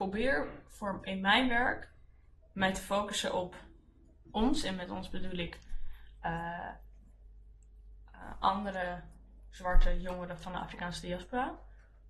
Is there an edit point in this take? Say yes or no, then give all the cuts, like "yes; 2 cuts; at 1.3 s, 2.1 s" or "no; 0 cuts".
no; 0 cuts